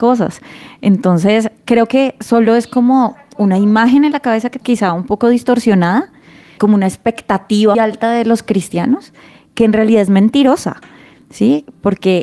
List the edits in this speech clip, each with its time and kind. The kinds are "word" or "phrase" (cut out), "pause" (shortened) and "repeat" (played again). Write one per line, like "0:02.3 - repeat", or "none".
0:04.6 - word
0:06.6 - word
0:07.7 - word